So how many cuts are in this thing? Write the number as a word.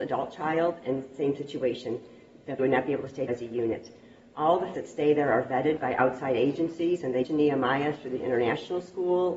four